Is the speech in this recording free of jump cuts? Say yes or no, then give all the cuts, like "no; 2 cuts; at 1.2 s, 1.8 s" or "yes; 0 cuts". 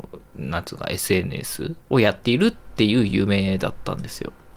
no; 1 cut; at 1.8 s